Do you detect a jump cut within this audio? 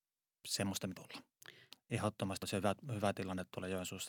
yes; 2 cuts; at 1.0 s, 2.4 s

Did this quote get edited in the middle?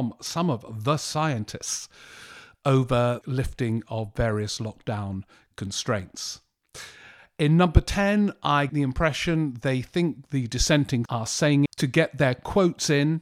yes; 4 cuts; at 3.2 s, 8.7 s, 11.1 s, 11.7 s

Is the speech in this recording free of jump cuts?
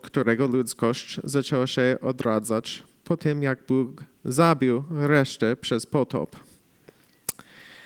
yes; 0 cuts

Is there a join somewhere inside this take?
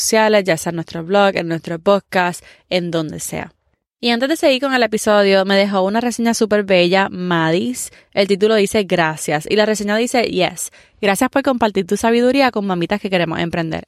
no; 0 cuts

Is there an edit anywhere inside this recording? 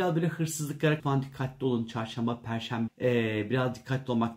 yes; 2 cuts; at 1.0 s, 2.9 s

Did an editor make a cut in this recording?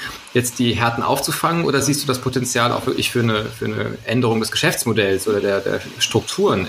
no; 0 cuts

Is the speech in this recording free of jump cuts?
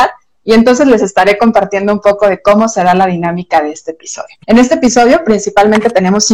no; 1 cut; at 4.4 s

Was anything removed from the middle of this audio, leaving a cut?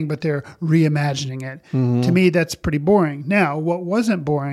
no; 0 cuts

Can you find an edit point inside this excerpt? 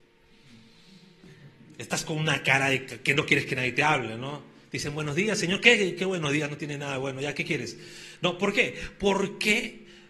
no; 0 cuts

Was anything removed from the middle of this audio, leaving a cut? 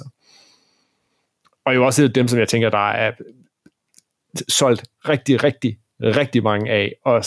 no; 0 cuts

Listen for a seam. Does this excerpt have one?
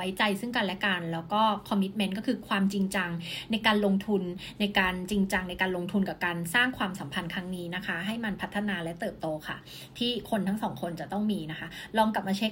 no; 0 cuts

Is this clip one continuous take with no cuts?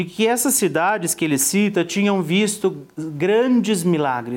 yes; 0 cuts

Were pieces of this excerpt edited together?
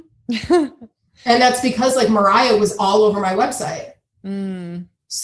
no; 0 cuts

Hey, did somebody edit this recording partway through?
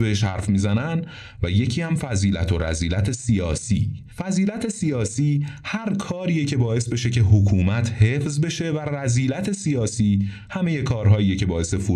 no; 0 cuts

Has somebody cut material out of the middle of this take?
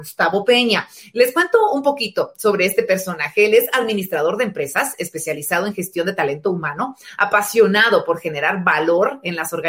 no; 0 cuts

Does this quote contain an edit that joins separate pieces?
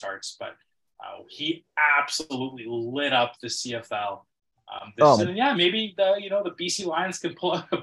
yes; 2 cuts; at 5.2 s, 5.5 s

